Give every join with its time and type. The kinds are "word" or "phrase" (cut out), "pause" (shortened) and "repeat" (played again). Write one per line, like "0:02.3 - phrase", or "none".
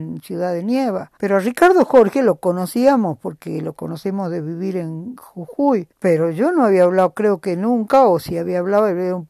0:01.2 - pause
0:05.9 - pause